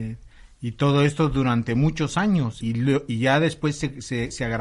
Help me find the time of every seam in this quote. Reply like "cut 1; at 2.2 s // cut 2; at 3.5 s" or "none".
cut 1; at 2.6 s